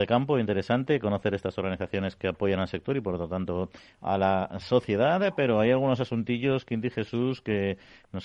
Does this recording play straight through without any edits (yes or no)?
yes